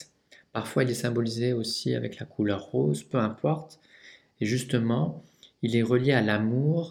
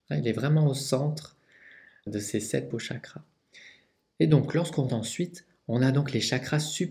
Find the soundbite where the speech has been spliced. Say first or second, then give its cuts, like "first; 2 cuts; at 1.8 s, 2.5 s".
second; 3 cuts; at 2.1 s, 2.7 s, 4.9 s